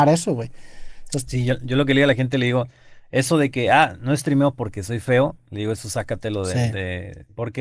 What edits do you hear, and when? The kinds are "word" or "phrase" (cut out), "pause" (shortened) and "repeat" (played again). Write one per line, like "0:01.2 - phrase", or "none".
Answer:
none

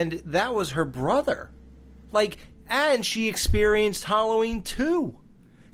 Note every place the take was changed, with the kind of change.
none

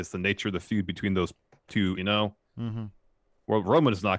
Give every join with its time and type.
0:01.9 - word

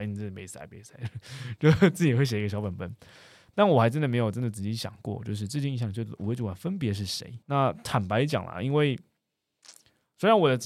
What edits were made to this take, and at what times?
0:07.4 - pause

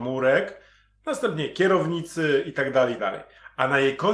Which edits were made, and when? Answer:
0:03.0 - word

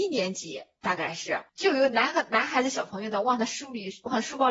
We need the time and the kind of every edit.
0:01.5 - pause

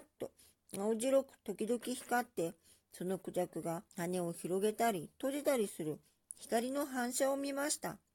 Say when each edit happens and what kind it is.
0:03.9 - pause

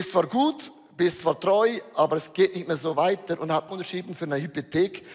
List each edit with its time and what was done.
0:03.7 - phrase

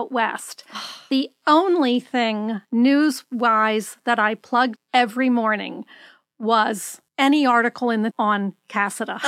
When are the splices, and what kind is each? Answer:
0:02.6 - pause
0:04.8 - word
0:07.1 - pause
0:08.1 - word

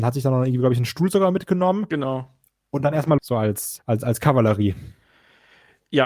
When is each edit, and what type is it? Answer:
0:03.2 - word
0:03.8 - word

